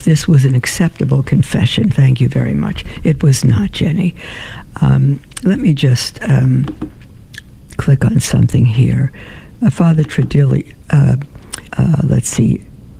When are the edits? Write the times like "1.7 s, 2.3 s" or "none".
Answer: 11.7 s